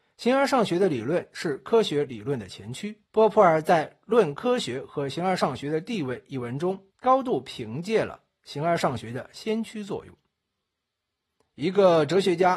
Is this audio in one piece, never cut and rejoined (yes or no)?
no